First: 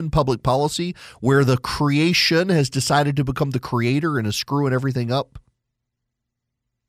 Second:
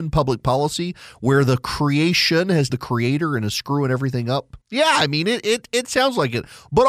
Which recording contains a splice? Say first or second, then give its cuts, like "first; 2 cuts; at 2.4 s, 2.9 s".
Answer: second; 2 cuts; at 2.7 s, 4.6 s